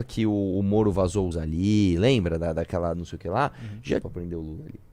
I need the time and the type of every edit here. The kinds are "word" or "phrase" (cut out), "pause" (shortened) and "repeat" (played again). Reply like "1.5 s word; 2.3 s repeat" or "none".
1.3 s phrase; 2.9 s phrase; 4.0 s phrase